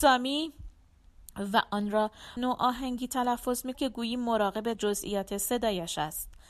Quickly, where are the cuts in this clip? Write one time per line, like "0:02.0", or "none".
0:02.4
0:03.7
0:04.7

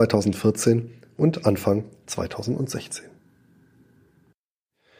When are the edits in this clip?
none

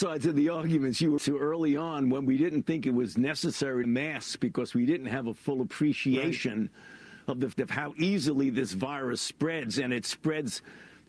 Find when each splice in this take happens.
0:01.2
0:03.8
0:07.5

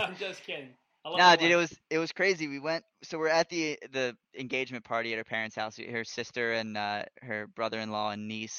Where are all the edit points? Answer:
0:01.8
0:02.9
0:04.2

